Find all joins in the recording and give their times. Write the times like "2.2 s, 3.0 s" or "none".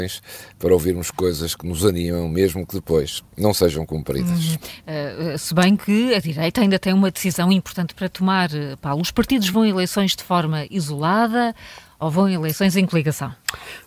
none

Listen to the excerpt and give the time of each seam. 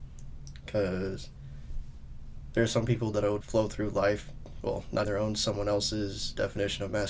3.4 s, 4.6 s, 5.0 s

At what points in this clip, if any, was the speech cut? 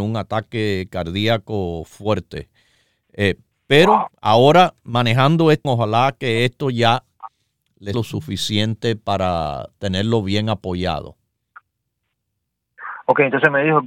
5.6 s, 7.9 s

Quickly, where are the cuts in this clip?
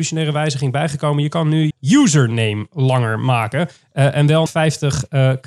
1.7 s, 4.5 s

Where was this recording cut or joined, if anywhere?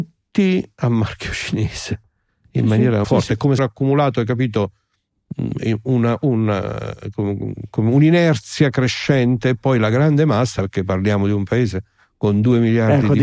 3.0 s, 3.6 s, 7.1 s

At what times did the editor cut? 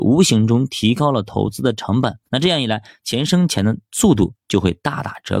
2.3 s

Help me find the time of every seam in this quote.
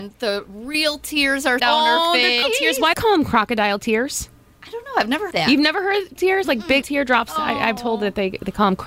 1.6 s, 2.4 s, 2.9 s, 5.3 s, 6.2 s, 6.8 s, 7.8 s

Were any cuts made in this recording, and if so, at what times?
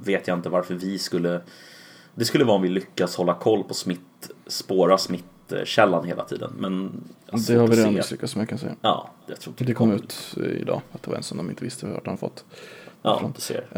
8.8 s

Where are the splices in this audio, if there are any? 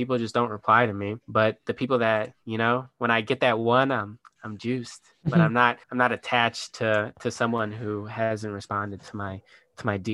1.2 s, 5.8 s

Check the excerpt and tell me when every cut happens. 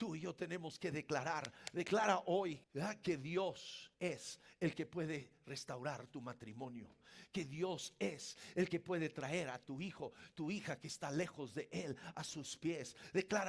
2.6 s, 3.9 s

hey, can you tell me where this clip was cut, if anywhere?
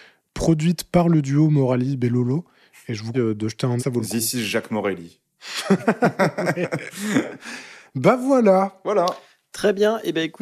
3.1 s, 3.8 s

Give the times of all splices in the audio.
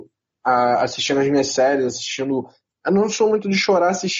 none

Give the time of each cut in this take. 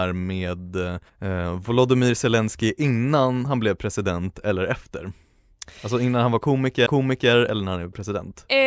1.1 s, 6.9 s

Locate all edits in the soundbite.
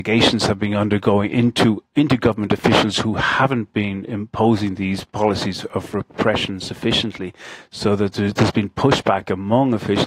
none

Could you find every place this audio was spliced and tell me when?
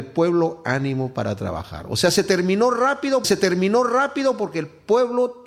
3.2 s

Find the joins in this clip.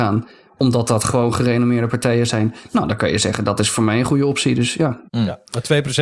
none

